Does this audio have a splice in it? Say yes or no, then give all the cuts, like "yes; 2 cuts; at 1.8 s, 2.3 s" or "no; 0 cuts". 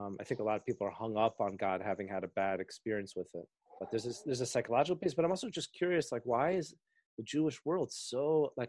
yes; 1 cut; at 3.7 s